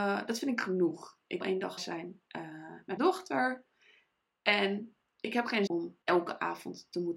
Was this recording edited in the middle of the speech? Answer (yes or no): yes